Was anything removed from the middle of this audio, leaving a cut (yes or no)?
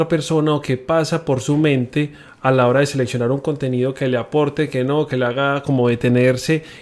no